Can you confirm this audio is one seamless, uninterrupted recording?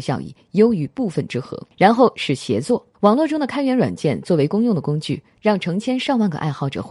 no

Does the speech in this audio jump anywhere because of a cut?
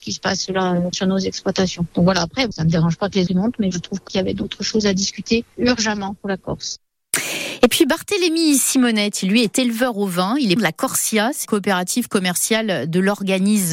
yes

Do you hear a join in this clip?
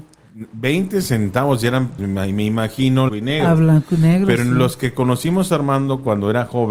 yes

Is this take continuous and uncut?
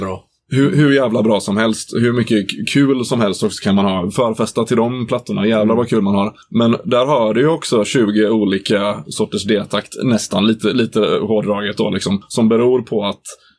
yes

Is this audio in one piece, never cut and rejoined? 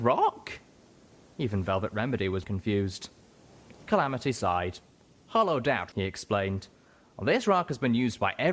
no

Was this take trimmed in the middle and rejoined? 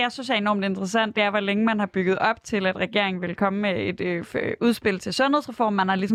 no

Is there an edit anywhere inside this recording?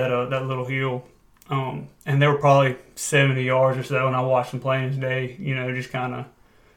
no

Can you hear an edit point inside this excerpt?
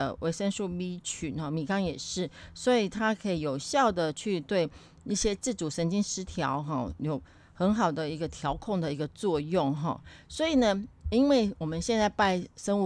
no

